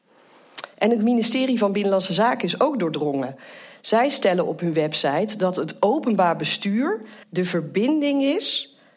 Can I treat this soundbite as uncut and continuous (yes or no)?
no